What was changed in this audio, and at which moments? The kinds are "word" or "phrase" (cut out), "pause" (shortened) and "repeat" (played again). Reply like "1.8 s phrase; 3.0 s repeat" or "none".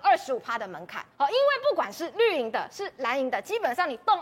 1.1 s pause